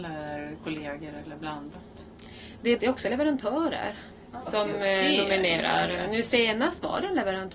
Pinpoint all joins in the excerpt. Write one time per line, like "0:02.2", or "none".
0:02.8